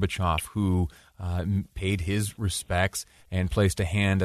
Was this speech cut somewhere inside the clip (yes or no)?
no